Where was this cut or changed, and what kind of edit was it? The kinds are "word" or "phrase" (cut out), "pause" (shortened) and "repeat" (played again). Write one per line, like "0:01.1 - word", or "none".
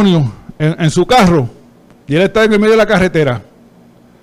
none